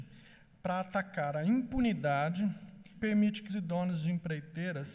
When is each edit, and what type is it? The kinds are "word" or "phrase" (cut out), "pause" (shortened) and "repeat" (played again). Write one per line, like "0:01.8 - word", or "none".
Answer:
0:02.9 - word
0:03.5 - word